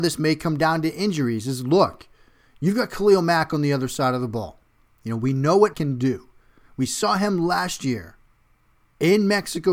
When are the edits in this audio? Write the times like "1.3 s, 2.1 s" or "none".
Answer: 5.7 s